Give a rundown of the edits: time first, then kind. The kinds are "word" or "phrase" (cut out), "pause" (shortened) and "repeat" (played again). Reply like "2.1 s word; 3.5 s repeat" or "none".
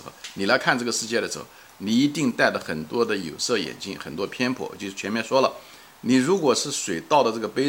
none